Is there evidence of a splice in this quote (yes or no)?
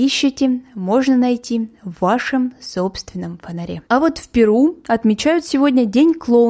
yes